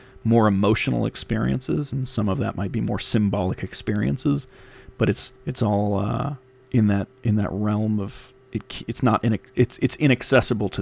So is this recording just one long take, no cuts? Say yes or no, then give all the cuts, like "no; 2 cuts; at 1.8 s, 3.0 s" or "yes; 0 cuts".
no; 3 cuts; at 5.4 s, 6.6 s, 8.4 s